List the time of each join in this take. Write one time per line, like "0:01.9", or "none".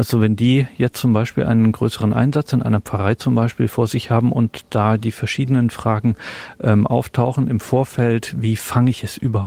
none